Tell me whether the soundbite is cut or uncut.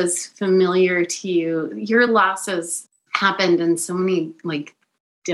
uncut